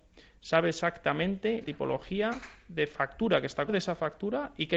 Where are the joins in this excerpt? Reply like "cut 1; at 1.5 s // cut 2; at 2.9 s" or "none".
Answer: cut 1; at 1.7 s // cut 2; at 3.7 s